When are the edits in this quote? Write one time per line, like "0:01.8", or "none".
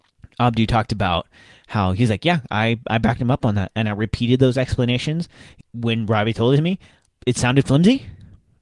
0:05.6